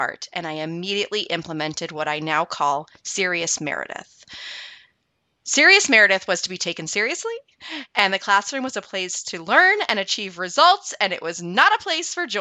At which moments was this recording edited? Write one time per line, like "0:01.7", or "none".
none